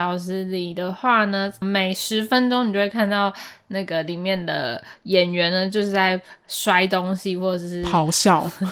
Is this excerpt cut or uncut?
cut